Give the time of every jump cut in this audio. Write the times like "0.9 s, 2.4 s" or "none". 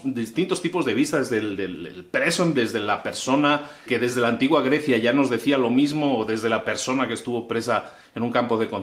2.5 s, 3.9 s